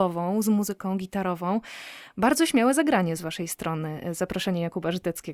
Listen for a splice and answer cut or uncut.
uncut